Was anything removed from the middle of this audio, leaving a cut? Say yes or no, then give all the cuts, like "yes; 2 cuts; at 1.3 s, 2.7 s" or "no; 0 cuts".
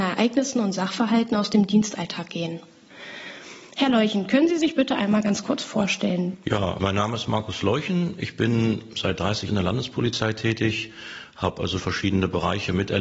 yes; 3 cuts; at 6.8 s, 9.5 s, 11.8 s